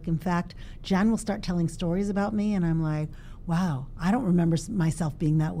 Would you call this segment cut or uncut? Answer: uncut